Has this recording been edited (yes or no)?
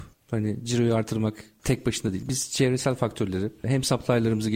no